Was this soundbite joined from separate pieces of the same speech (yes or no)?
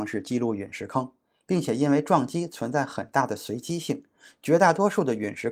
no